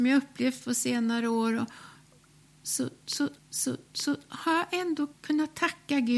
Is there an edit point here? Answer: yes; 2 cuts; at 3.4 s, 5.2 s

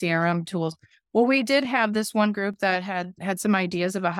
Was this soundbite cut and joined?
no; 0 cuts

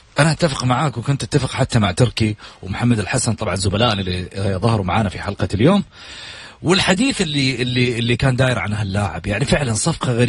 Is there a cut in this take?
no; 0 cuts

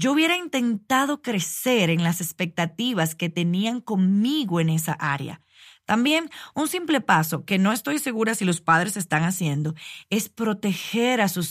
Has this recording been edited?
no; 0 cuts

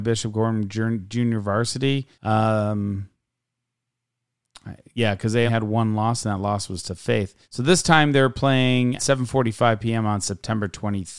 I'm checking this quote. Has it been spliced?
yes; 4 cuts; at 2.1 s, 5.5 s, 7.4 s, 9.0 s

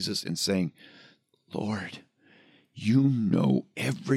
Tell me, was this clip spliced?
no; 0 cuts

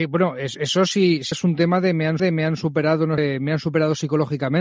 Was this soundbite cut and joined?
yes; 3 cuts; at 1.3 s, 2.2 s, 3.2 s

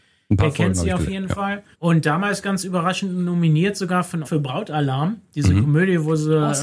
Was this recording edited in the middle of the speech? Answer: yes; 2 cuts; at 1.7 s, 4.2 s

